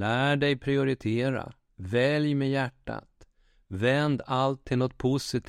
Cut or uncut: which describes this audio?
uncut